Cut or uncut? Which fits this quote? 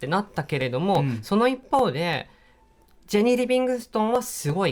uncut